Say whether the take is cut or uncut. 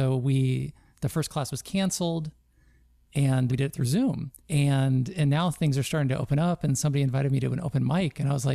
cut